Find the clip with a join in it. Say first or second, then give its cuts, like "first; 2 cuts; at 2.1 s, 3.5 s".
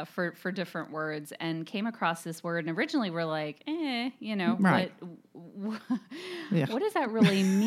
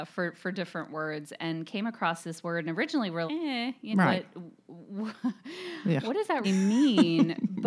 second; 3 cuts; at 3.3 s, 3.9 s, 6.4 s